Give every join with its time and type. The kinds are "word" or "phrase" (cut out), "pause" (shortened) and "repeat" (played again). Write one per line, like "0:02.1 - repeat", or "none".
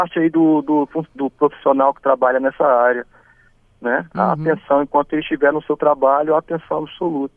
none